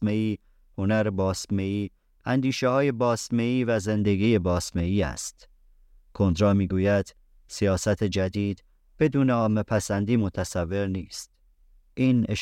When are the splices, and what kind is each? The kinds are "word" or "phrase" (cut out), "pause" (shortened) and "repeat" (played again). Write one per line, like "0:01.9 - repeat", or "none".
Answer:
none